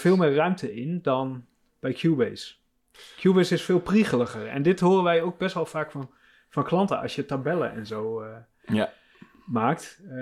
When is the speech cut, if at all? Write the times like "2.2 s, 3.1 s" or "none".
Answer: none